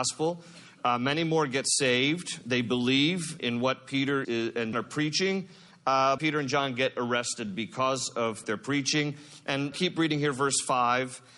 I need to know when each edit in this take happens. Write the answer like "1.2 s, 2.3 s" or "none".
3.4 s, 4.2 s, 4.7 s, 6.2 s, 8.4 s, 9.7 s